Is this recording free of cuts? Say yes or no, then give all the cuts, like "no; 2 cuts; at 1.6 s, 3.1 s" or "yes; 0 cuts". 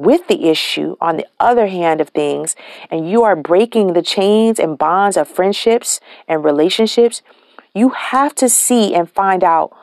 yes; 0 cuts